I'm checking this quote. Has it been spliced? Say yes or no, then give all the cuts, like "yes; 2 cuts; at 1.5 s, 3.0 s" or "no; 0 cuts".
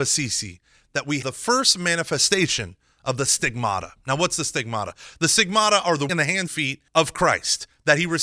yes; 4 cuts; at 1.2 s, 6.1 s, 6.5 s, 6.9 s